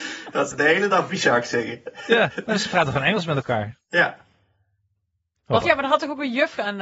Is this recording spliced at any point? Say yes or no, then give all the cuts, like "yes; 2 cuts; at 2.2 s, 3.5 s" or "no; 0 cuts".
yes; 2 cuts; at 1.1 s, 5.6 s